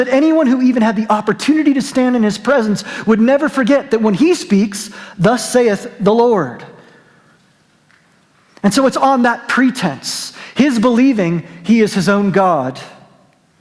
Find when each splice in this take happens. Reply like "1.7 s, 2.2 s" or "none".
none

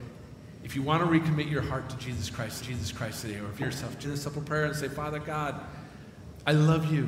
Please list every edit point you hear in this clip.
2.6 s, 3.6 s, 4.0 s

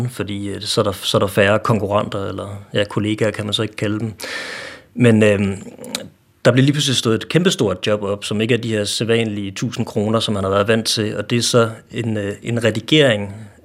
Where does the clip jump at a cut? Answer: none

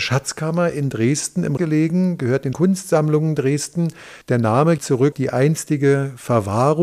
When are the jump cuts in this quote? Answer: 1.6 s, 2.5 s, 4.2 s, 4.8 s, 5.1 s

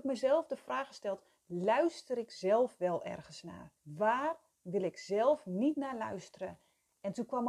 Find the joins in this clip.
3.8 s

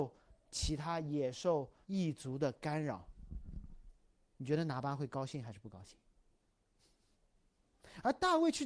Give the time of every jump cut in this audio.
1.8 s, 4.1 s

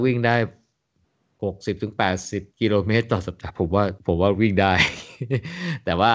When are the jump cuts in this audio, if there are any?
2.5 s

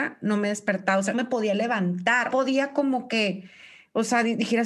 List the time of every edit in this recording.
1.1 s, 2.3 s

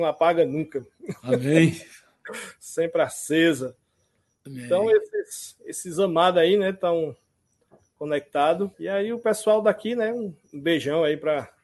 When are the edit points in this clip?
8.7 s

